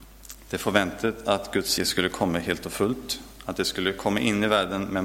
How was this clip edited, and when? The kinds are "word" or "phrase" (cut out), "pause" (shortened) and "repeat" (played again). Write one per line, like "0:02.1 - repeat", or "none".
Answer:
0:01.8 - word